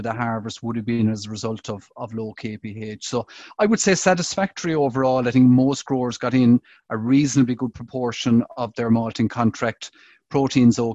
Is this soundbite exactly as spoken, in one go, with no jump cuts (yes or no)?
yes